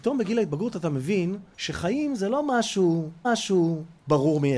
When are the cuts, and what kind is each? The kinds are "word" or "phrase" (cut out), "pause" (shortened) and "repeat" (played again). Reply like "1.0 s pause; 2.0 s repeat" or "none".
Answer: 3.2 s repeat